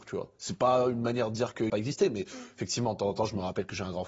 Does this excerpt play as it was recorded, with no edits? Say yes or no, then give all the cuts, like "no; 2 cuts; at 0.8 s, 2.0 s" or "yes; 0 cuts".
no; 1 cut; at 1.7 s